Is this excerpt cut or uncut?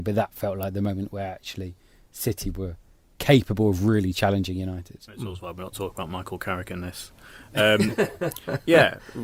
uncut